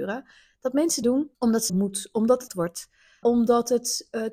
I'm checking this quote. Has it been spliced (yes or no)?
yes